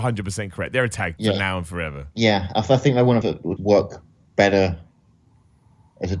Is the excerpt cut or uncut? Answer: cut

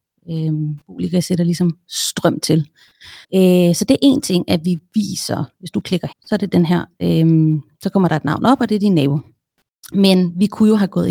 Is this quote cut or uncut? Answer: cut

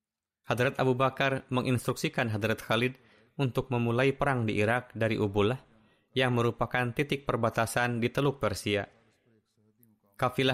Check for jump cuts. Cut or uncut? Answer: uncut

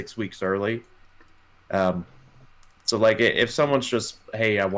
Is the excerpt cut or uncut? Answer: uncut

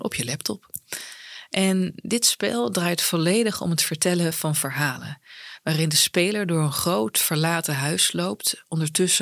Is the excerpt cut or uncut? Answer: uncut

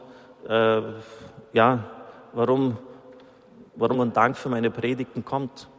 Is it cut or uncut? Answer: cut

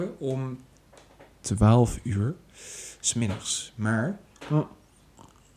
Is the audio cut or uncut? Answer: uncut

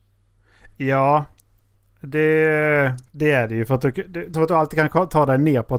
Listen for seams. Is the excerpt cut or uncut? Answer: cut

